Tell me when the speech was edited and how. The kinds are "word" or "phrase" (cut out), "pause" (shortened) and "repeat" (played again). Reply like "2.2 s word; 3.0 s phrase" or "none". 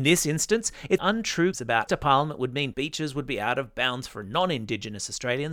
1.0 s phrase; 1.5 s word; 1.9 s phrase; 2.7 s word